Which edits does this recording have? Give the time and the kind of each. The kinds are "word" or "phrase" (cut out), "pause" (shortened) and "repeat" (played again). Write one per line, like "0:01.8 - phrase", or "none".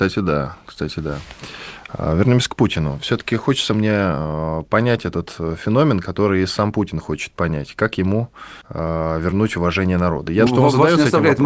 0:08.6 - pause
0:10.5 - word

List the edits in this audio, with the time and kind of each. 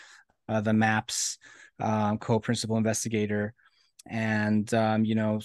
none

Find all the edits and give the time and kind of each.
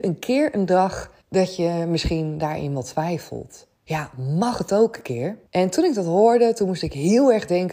0:01.2 - pause
0:03.8 - pause
0:05.5 - pause

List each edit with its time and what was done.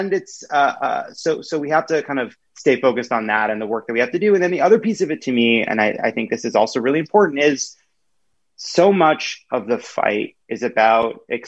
0:02.4 - pause
0:10.4 - pause

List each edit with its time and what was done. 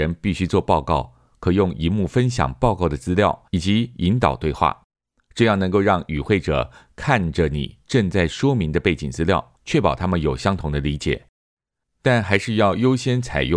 0:03.5 - pause
0:09.6 - pause

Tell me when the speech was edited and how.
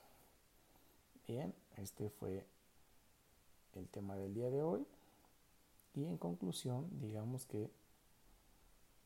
none

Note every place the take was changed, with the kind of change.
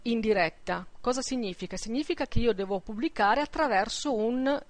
none

